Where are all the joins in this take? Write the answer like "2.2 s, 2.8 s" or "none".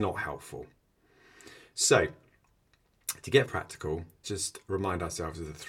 3.4 s, 4.2 s